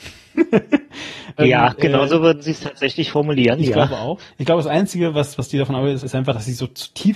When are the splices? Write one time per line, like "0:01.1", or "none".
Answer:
0:01.4
0:06.0